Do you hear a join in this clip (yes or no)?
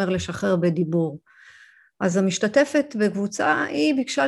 no